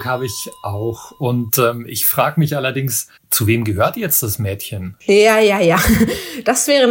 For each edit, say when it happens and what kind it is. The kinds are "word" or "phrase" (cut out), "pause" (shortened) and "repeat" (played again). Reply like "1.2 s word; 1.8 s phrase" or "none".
3.2 s pause